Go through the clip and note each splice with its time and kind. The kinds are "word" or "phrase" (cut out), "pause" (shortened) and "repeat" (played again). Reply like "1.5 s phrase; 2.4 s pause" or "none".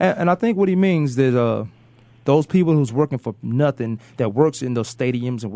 none